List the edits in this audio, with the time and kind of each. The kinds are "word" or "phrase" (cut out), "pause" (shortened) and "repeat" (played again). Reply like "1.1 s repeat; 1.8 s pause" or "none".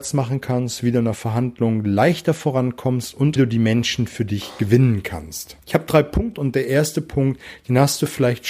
3.4 s phrase; 5.6 s pause; 6.3 s word